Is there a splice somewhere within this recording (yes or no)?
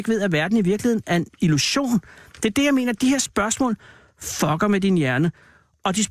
no